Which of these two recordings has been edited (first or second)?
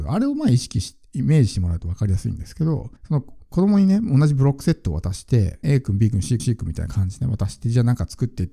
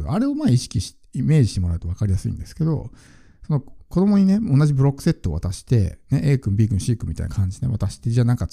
first